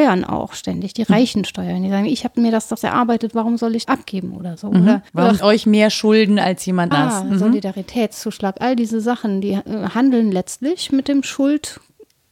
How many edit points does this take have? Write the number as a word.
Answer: six